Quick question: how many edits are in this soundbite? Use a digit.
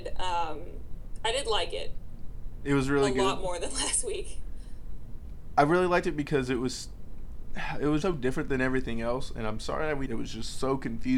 2